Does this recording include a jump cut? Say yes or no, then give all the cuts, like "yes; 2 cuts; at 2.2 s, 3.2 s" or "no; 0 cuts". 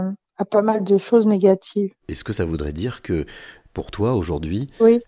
no; 0 cuts